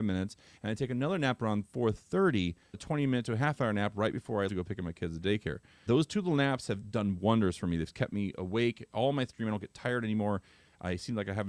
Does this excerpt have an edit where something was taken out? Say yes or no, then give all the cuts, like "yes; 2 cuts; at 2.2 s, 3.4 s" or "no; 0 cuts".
yes; 3 cuts; at 2.7 s, 4.5 s, 5.9 s